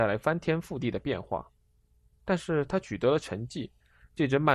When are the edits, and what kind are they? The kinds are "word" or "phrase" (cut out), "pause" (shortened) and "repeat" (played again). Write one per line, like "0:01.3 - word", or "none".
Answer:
none